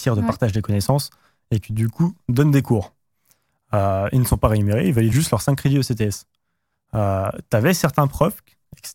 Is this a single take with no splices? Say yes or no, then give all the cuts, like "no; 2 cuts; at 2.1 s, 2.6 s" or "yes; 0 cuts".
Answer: yes; 0 cuts